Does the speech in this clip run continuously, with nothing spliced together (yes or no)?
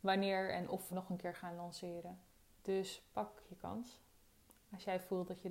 no